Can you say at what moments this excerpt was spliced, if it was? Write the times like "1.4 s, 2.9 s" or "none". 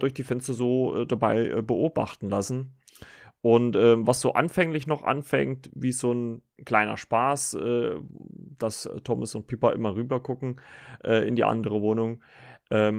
none